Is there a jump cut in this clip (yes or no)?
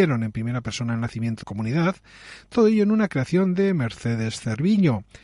yes